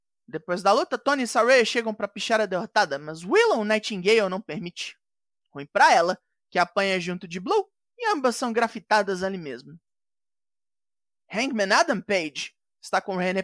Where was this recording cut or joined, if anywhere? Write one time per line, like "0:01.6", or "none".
none